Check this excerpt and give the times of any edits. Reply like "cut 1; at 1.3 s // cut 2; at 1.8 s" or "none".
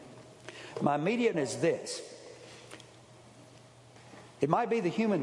cut 1; at 1.3 s